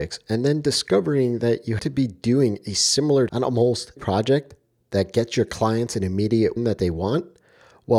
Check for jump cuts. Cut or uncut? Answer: cut